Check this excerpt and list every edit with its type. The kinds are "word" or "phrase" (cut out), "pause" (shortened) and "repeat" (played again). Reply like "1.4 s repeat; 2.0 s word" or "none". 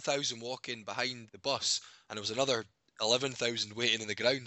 1.3 s word